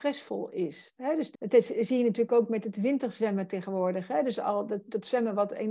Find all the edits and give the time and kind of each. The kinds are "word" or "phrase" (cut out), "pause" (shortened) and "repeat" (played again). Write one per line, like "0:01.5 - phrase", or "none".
0:01.3 - word